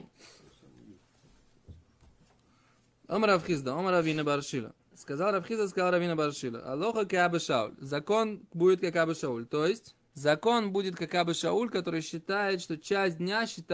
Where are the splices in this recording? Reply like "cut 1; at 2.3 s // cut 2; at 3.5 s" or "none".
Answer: cut 1; at 10.1 s